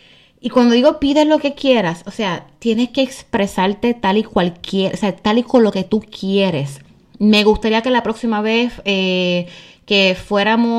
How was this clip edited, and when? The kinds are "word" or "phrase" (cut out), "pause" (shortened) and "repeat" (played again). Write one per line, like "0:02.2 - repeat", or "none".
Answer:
none